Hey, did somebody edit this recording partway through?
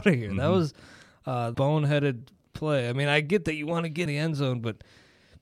yes; 2 cuts; at 1.5 s, 4.1 s

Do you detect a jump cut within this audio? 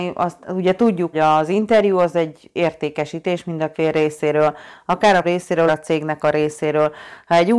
yes; 4 cuts; at 1.1 s, 3.7 s, 5.2 s, 5.7 s

